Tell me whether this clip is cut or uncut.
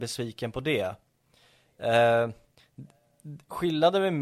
uncut